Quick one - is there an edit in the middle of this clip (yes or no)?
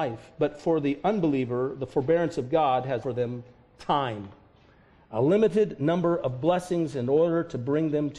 yes